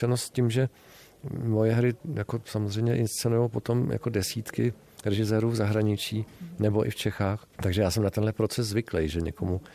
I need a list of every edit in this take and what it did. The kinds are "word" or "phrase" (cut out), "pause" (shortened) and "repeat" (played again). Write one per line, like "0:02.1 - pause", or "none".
0:07.5 - pause